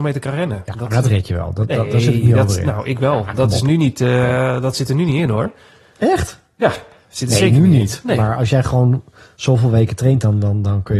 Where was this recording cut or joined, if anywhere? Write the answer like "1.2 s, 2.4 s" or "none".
none